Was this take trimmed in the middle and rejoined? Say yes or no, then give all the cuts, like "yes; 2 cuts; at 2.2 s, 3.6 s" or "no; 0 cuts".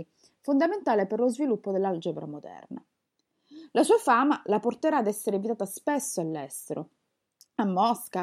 no; 0 cuts